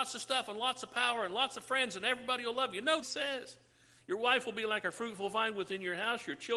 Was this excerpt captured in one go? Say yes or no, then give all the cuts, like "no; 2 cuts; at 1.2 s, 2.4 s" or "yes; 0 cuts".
no; 1 cut; at 3.0 s